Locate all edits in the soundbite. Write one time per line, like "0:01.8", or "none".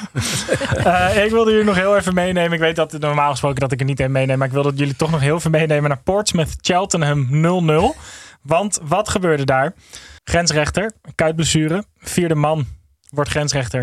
0:10.2